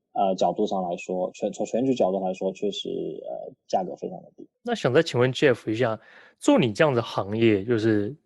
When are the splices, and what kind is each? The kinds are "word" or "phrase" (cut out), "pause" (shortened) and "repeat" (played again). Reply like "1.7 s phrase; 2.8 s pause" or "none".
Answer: none